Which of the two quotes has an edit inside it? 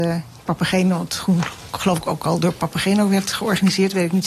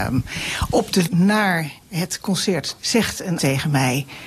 second; 4 cuts; at 1.1 s, 1.8 s, 2.8 s, 3.4 s

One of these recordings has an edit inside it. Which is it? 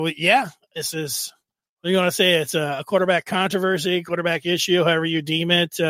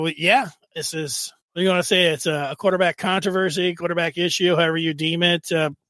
second; 1 cut; at 1.4 s

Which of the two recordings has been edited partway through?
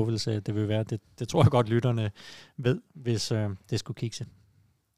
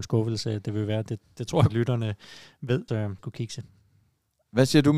second; 3 cuts; at 1.7 s, 2.9 s, 3.2 s

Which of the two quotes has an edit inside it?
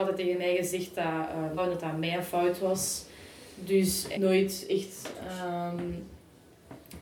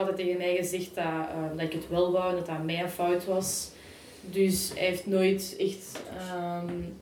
first; 2 cuts; at 1.6 s, 4.1 s

